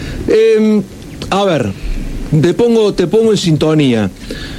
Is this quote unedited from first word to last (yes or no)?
yes